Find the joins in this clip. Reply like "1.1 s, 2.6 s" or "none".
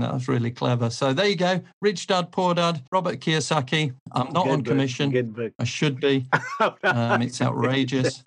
2.9 s, 4.0 s